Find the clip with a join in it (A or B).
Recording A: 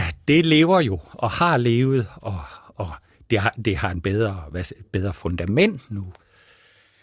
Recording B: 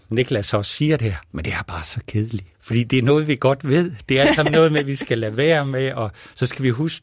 B